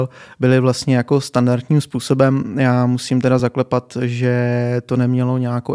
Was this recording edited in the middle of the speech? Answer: no; 0 cuts

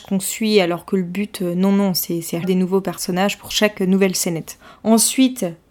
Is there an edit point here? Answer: yes; 1 cut; at 2.4 s

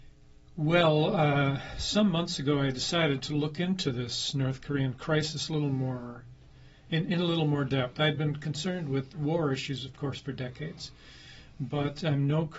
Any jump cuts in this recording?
no; 0 cuts

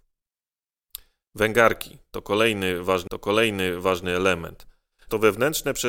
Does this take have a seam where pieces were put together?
yes; 1 cut; at 3.1 s

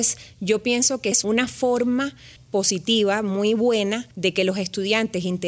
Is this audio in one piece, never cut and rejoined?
no; 3 cuts; at 1.1 s, 2.4 s, 4.1 s

